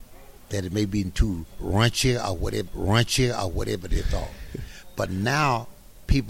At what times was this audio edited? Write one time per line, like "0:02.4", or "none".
0:02.7